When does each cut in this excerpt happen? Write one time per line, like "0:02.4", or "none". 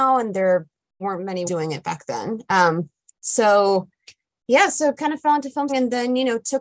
0:01.0
0:01.5
0:05.0
0:05.7